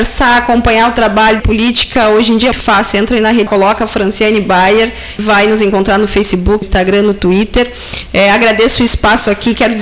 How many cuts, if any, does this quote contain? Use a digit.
5